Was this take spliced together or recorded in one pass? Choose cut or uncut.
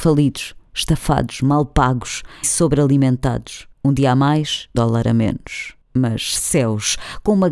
cut